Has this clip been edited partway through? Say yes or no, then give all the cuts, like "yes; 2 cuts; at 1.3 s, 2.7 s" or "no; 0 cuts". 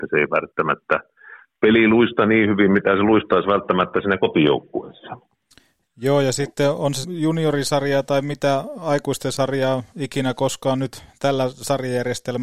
yes; 1 cut; at 7.0 s